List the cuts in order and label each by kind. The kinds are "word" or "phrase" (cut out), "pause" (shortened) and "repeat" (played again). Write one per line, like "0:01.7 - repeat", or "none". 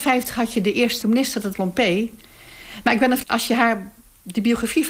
0:01.0 - word
0:01.5 - word
0:03.2 - word